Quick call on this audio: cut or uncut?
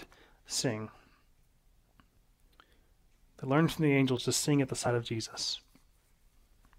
uncut